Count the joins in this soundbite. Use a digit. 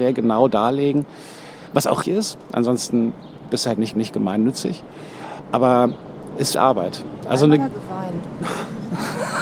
4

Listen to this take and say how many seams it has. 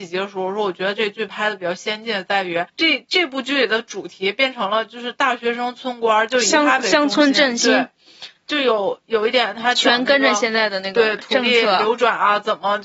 1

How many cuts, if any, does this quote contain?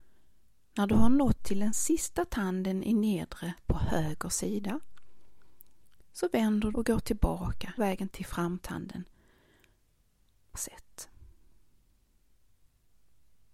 5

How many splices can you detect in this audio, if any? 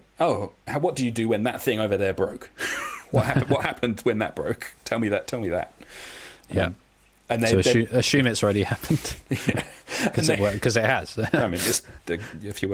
0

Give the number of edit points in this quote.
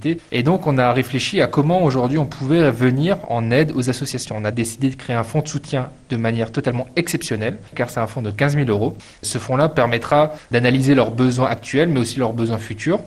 1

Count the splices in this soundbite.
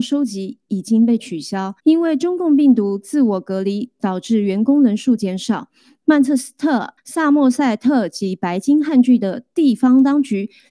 2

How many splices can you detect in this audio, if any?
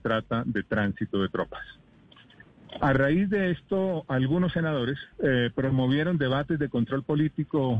1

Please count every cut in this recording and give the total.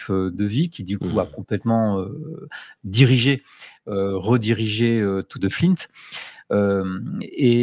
1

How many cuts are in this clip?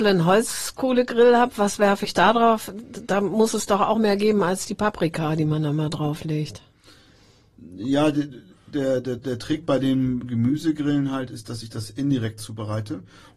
0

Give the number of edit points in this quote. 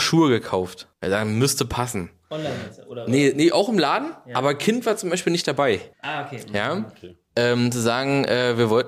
2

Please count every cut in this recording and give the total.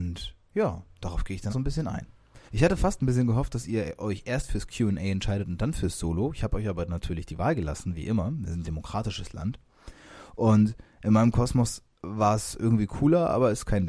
4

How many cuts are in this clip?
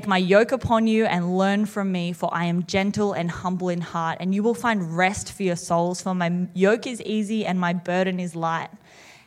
0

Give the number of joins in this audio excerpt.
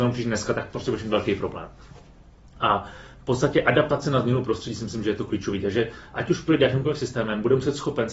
0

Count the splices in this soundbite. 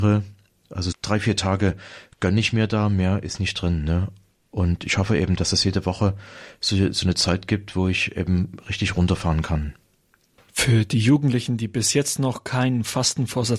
1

